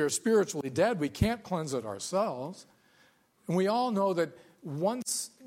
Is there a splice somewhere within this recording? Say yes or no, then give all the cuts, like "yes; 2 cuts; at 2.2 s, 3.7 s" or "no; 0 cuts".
no; 0 cuts